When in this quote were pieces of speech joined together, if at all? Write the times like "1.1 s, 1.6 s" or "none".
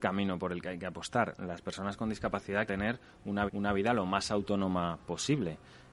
2.7 s, 3.5 s